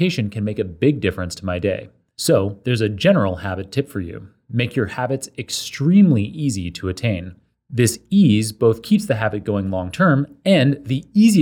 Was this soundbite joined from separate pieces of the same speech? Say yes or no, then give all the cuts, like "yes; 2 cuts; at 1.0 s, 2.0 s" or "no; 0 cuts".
no; 0 cuts